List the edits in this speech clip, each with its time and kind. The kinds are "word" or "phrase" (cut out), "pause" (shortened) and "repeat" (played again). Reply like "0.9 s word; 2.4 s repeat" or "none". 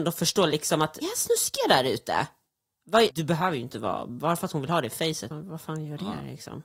1.0 s word; 3.1 s word; 5.3 s word

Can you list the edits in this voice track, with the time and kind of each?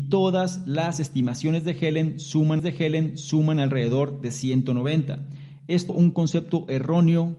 2.6 s repeat; 5.9 s word

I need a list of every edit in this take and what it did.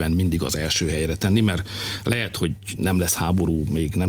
none

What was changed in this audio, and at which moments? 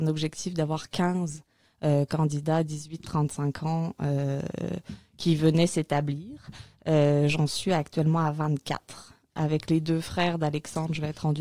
none

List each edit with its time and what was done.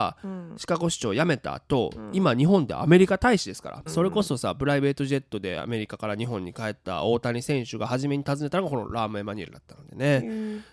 3.9 s phrase

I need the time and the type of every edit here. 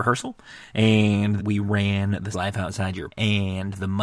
1.4 s word; 2.3 s word; 3.1 s word

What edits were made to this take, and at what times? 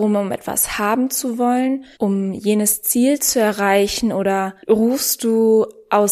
1.9 s pause; 4.6 s pause

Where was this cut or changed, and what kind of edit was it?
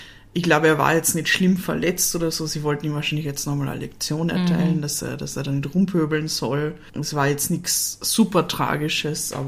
none

